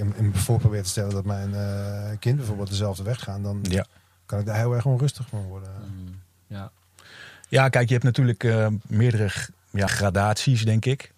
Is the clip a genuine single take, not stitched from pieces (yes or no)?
no